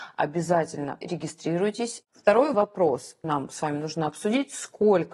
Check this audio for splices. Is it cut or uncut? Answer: cut